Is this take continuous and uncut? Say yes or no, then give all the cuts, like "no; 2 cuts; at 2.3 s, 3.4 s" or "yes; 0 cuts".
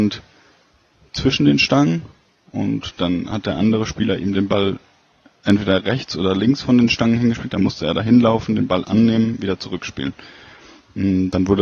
yes; 0 cuts